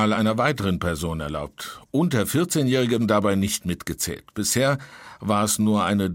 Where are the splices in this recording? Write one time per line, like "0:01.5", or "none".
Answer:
0:03.0

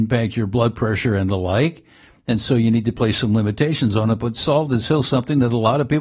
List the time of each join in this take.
none

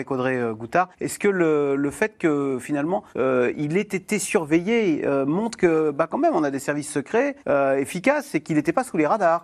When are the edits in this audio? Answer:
0:00.9
0:03.1
0:07.4

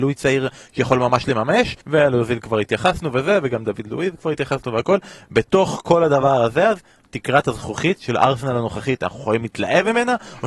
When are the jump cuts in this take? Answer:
0:01.8
0:07.0

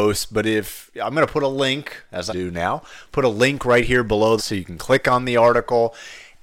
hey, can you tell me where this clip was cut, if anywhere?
0:02.3
0:04.4

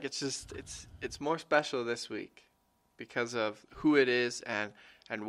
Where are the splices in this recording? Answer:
none

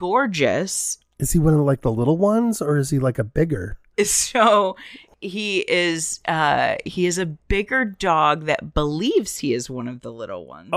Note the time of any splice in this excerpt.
none

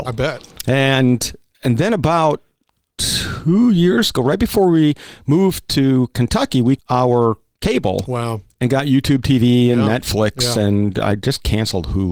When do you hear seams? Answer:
0:06.8

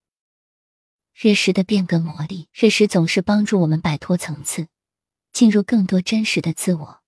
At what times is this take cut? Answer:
0:02.5

